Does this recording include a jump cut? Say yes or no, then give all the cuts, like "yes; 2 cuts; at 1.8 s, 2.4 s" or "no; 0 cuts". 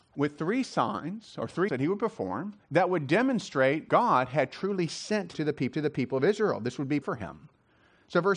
yes; 6 cuts; at 1.7 s, 2.6 s, 3.9 s, 5.3 s, 5.7 s, 7.0 s